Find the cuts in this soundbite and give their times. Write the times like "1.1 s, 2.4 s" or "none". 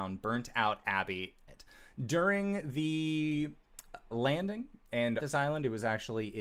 1.5 s, 4.1 s, 5.2 s